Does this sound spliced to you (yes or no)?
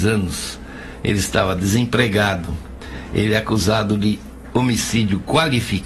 no